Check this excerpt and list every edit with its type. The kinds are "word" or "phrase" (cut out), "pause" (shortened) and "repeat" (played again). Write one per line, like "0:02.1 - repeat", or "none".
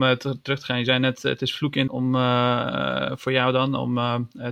0:01.9 - phrase